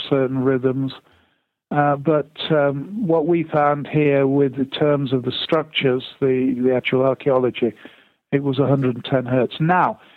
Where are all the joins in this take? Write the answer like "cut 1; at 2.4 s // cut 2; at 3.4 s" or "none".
none